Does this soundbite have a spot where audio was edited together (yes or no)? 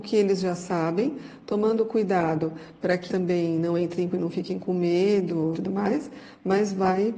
yes